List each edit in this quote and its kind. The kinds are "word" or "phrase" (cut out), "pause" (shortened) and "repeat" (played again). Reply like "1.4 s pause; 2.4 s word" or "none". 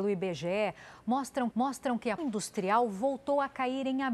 1.5 s repeat; 2.2 s word